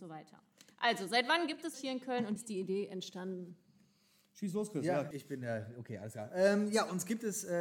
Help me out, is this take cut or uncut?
cut